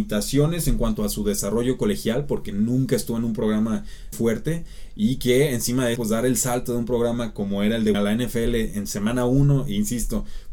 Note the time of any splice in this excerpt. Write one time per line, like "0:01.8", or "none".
0:04.1
0:06.0
0:07.9